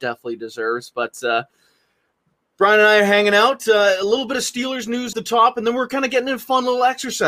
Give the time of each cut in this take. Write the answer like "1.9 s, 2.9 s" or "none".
5.1 s